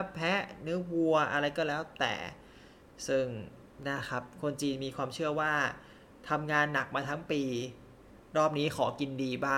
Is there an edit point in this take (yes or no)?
no